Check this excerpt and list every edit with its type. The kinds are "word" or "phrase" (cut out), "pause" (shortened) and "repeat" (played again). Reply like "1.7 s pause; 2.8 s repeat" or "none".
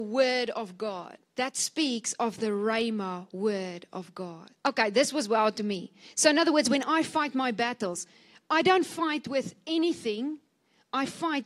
1.2 s pause; 4.6 s pause